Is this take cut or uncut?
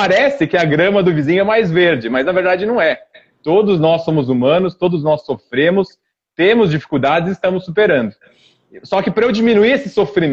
uncut